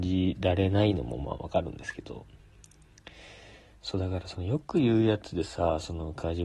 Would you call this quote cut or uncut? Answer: uncut